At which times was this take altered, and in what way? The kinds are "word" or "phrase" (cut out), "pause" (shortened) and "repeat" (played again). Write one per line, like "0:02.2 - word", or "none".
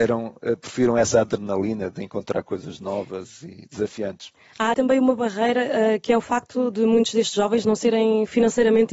0:04.7 - word